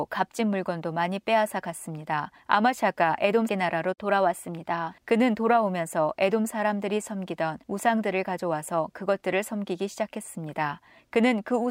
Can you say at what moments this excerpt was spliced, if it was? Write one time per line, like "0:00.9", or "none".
0:02.4
0:03.5
0:05.0
0:07.6